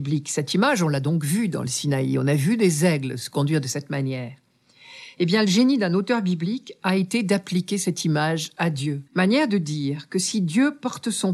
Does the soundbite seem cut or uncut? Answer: cut